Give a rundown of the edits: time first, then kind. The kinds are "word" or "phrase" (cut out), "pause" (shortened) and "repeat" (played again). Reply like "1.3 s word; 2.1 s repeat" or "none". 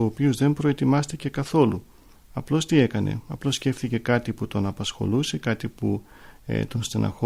none